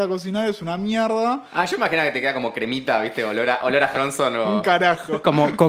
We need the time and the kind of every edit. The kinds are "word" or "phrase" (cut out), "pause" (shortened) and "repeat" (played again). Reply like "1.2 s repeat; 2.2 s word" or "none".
3.9 s word